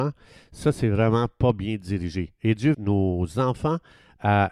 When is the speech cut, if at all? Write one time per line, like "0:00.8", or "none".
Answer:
0:02.7